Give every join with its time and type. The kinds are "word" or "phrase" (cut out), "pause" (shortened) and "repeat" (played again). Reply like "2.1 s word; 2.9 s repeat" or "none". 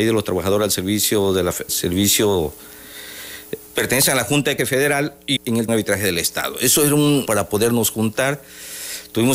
1.7 s word; 3.7 s word; 4.6 s phrase; 5.4 s word; 5.7 s phrase; 7.3 s word

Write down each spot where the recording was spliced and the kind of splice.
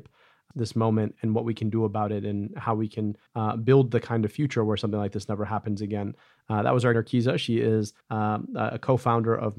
1.1 s word; 3.3 s pause; 6.9 s phrase; 8.0 s pause

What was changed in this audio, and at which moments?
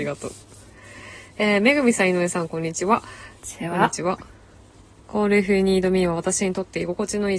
none

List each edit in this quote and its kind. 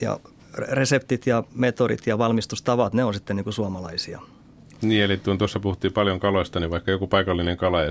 none

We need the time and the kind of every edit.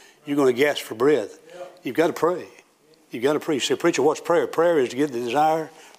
none

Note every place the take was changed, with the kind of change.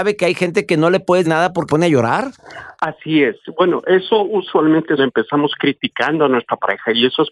1.2 s word; 1.7 s word; 2.8 s pause; 5.0 s phrase

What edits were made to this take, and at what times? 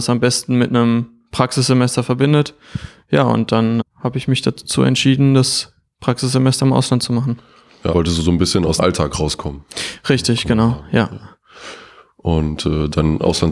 3.8 s word; 7.9 s word; 8.8 s word

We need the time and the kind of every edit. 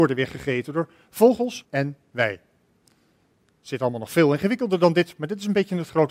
1.6 s word

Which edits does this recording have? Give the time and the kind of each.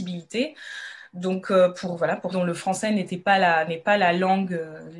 2.3 s word

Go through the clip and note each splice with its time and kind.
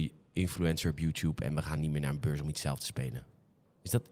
none

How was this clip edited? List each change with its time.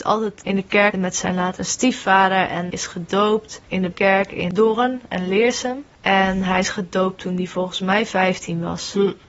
0.9 s word; 1.2 s word; 2.7 s word; 3.9 s word

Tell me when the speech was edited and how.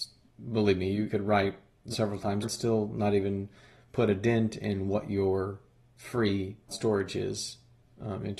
1.1 s word; 1.9 s word; 2.4 s word; 6.7 s word

